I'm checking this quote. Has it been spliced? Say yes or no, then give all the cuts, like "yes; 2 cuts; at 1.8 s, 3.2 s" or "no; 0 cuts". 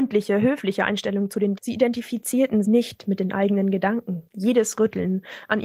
yes; 3 cuts; at 1.6 s, 2.6 s, 4.3 s